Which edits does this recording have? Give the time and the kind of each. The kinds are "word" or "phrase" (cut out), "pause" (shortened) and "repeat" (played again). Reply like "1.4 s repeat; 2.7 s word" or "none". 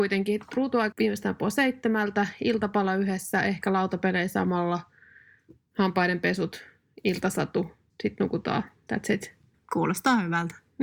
0.9 s word; 7.9 s phrase